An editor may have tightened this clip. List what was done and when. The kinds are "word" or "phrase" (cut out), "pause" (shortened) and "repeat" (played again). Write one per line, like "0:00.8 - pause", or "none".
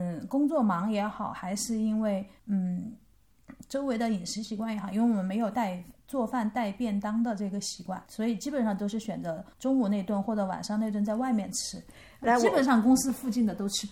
0:02.4 - pause
0:06.0 - pause
0:08.0 - pause
0:09.5 - pause